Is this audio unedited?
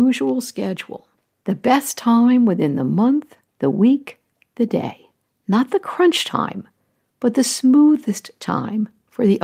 yes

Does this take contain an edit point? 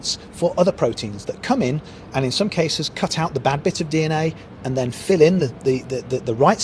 no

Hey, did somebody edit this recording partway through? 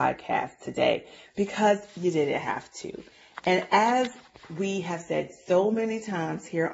no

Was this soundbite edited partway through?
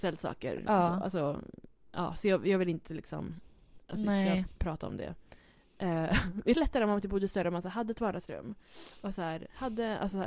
yes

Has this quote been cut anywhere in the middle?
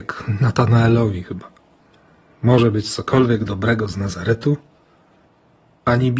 no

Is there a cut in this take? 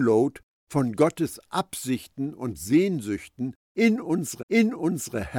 yes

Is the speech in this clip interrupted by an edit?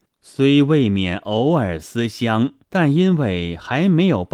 yes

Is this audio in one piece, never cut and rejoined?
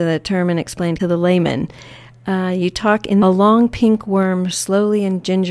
no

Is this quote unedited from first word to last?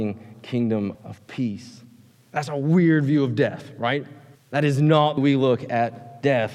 no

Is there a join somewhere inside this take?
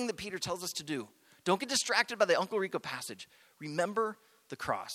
no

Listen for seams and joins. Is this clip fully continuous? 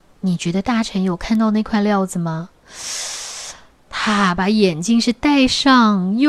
yes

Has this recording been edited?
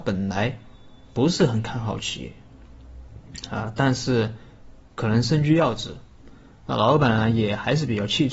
no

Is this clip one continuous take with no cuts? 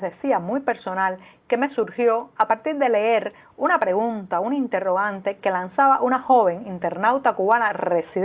yes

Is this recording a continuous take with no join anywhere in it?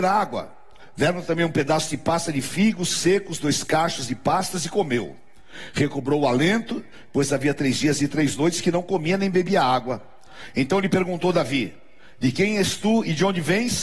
yes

